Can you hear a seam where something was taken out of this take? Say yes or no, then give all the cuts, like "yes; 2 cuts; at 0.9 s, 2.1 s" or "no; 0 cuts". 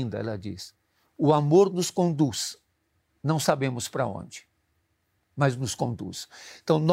no; 0 cuts